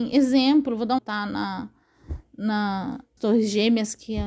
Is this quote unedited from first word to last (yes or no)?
no